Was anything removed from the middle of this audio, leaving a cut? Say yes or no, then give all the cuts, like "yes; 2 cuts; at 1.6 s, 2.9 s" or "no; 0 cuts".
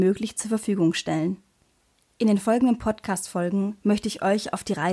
no; 0 cuts